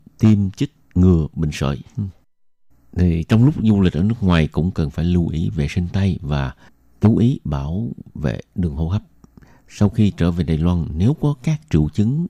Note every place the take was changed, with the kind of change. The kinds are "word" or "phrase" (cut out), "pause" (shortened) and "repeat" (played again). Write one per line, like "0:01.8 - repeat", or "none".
none